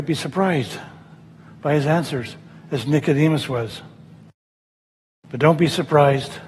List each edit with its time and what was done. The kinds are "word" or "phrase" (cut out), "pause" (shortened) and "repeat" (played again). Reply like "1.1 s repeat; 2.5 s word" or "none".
none

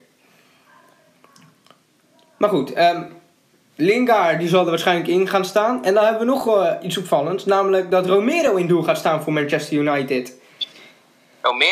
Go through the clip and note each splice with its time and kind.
none

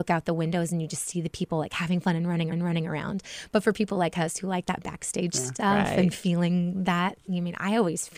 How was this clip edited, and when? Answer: 2.5 s repeat

